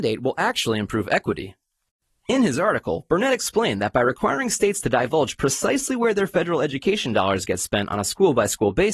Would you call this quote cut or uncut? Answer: uncut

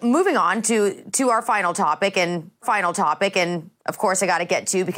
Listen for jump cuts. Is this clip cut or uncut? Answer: cut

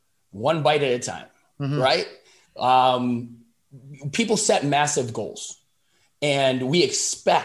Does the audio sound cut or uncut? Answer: uncut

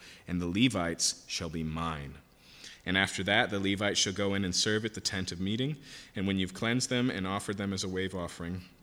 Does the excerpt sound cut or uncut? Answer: uncut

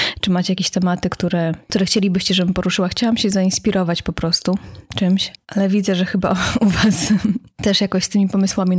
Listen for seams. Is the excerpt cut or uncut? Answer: uncut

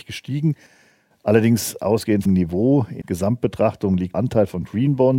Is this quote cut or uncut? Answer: cut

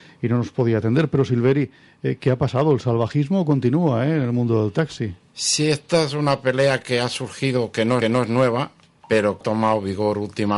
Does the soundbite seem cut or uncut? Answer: cut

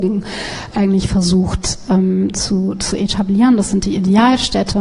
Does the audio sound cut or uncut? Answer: uncut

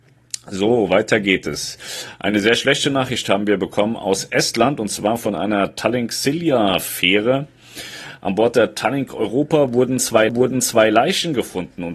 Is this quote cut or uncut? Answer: cut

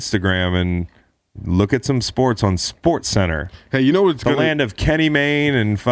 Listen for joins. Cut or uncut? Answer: uncut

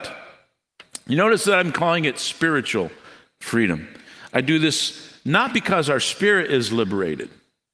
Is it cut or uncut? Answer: uncut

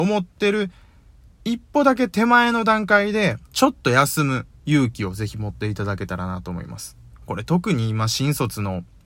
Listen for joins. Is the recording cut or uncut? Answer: cut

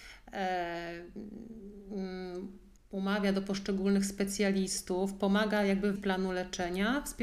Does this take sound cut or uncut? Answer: cut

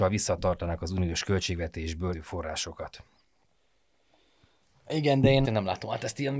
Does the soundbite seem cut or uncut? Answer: cut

